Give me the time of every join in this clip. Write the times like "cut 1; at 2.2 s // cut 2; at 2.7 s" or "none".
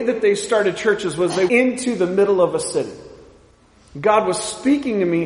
cut 1; at 1.5 s